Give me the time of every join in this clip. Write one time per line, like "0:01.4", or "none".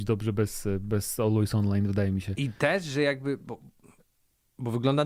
none